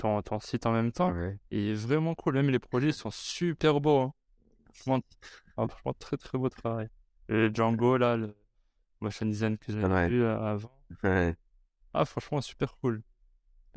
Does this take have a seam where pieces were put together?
no; 0 cuts

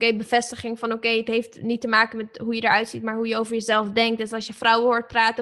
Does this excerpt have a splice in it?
no; 0 cuts

